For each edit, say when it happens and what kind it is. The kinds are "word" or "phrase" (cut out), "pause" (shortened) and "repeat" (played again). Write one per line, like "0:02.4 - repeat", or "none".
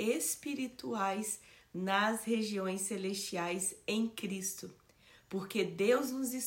none